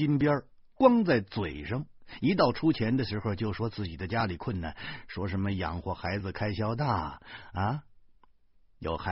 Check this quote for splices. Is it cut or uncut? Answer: uncut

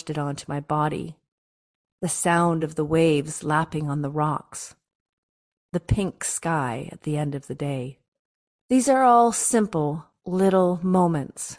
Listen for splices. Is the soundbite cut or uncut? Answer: uncut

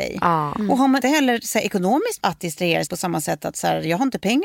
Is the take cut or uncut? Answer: cut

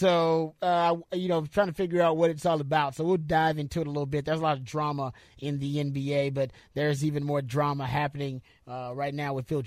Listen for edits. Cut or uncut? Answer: uncut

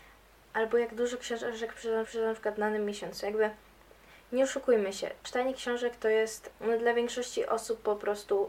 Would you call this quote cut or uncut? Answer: cut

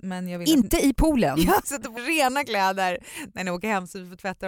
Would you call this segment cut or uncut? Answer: cut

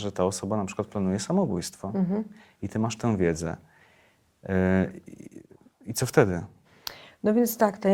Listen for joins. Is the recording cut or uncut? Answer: uncut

